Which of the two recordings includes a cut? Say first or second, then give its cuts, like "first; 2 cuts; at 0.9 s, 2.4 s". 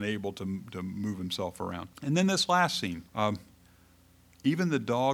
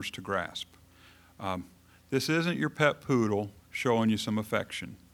first; 2 cuts; at 1.9 s, 3.1 s